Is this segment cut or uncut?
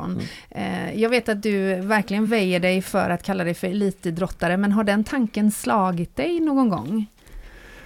uncut